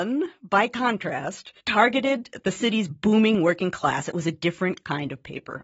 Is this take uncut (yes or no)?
no